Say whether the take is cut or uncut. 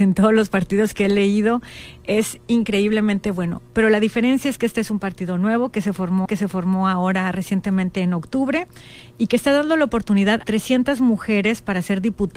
cut